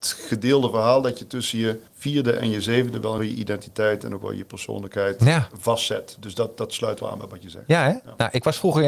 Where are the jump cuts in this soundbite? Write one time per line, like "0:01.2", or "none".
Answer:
0:01.9
0:03.2